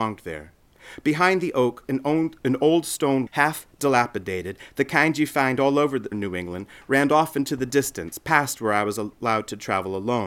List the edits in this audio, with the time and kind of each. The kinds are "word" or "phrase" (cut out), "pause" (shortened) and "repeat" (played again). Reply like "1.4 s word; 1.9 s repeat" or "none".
3.3 s word; 6.1 s word